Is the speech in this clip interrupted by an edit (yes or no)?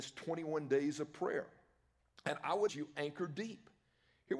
yes